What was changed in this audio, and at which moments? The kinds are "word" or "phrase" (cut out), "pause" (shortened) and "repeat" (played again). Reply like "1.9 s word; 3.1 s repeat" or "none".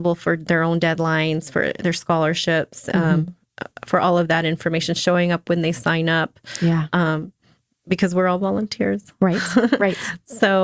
none

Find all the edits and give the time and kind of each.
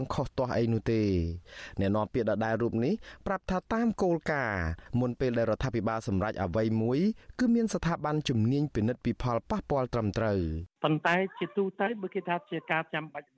10.7 s pause

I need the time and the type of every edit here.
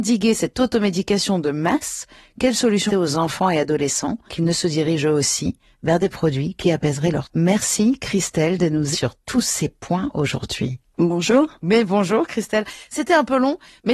2.9 s word; 4.3 s word; 7.2 s word; 8.9 s word

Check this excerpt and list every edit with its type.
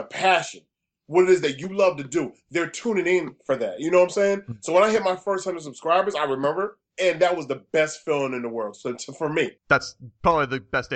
6.9 s pause; 9.6 s pause

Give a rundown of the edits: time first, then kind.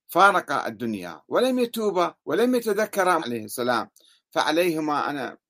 2.2 s pause; 3.2 s phrase

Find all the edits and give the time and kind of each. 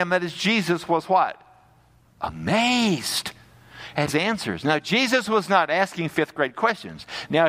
4.1 s phrase

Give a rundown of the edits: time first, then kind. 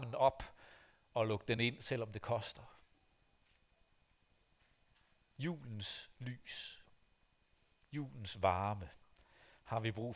none

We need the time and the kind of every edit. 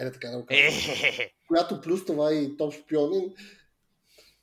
none

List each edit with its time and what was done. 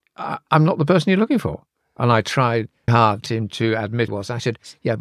2.9 s word; 3.3 s word; 4.1 s word

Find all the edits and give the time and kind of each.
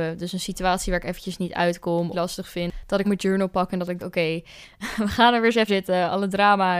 2.1 s phrase; 3.0 s word; 4.0 s word; 5.7 s phrase

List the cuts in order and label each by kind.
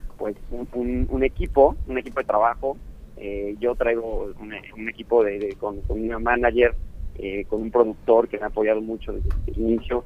none

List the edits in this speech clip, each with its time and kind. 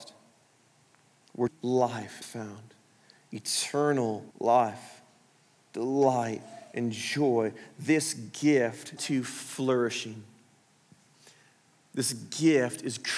1.5 s word; 2.2 s word; 4.3 s pause; 9.0 s phrase

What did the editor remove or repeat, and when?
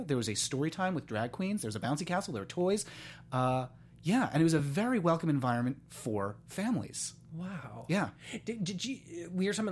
none

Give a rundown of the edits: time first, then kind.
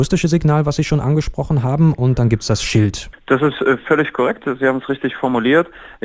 none

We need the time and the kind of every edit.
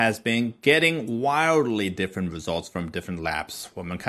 none

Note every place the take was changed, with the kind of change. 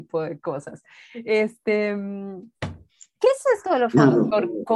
2.5 s pause

